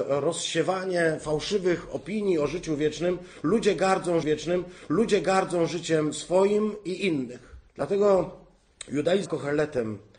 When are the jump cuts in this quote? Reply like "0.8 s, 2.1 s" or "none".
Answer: 4.2 s, 7.7 s, 9.3 s